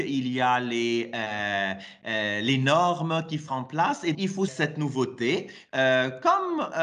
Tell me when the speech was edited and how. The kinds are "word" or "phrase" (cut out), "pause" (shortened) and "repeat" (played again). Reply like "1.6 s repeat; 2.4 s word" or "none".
3.5 s word; 4.1 s word; 4.5 s word